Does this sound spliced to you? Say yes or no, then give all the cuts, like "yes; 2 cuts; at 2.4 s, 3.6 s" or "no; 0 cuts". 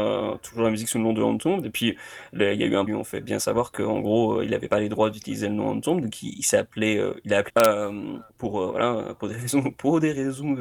yes; 3 cuts; at 2.9 s, 7.5 s, 8.3 s